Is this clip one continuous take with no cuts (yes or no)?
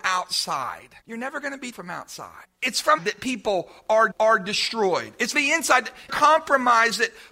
no